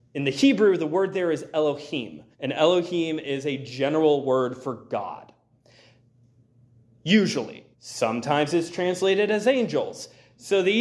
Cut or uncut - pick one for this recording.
cut